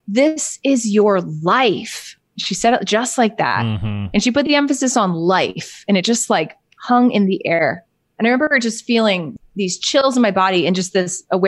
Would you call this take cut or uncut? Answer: uncut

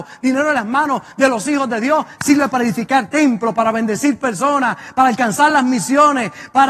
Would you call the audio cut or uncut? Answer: uncut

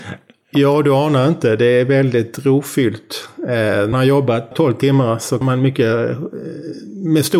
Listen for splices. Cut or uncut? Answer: cut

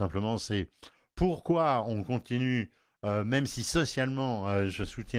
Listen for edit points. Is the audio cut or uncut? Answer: uncut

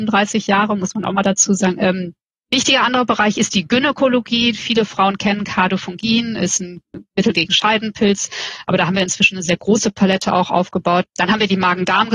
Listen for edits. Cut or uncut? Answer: uncut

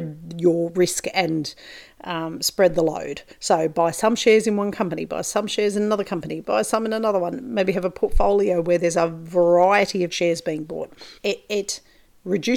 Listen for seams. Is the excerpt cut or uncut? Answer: cut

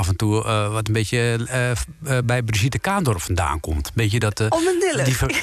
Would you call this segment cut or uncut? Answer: uncut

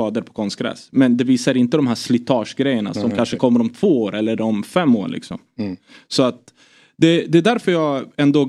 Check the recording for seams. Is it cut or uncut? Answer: uncut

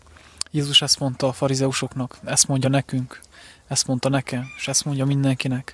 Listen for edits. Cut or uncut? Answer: uncut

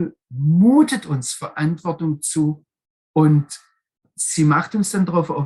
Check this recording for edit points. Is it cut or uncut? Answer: cut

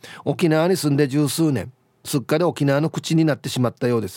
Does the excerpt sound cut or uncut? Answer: uncut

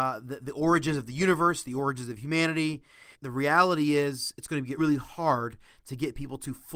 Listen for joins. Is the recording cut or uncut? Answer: cut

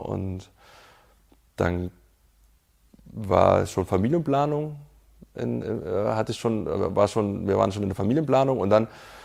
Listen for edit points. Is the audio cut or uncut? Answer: uncut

